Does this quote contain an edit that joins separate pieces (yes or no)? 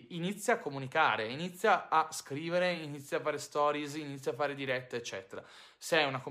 no